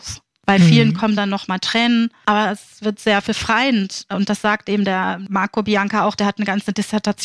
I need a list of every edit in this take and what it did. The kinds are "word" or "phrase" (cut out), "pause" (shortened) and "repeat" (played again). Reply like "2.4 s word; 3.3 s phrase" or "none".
none

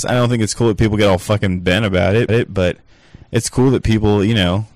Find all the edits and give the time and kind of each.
2.3 s repeat

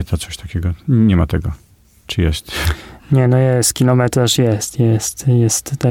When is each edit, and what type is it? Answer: none

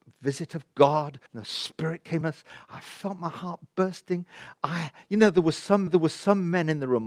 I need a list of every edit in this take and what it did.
1.3 s pause; 2.2 s word; 5.9 s repeat

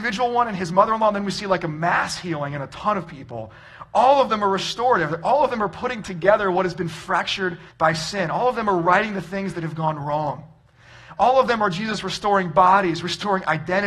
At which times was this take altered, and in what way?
6.0 s word; 7.7 s pause

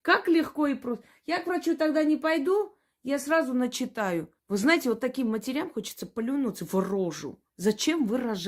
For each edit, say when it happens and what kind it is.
4.4 s pause; 7.5 s pause

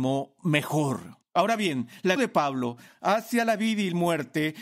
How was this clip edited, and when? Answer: 2.2 s word

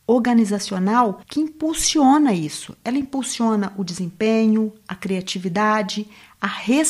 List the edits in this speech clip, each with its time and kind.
1.2 s pause

